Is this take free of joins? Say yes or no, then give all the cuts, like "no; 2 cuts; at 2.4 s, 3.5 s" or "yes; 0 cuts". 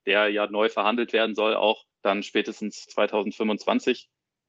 no; 2 cuts; at 1.9 s, 2.9 s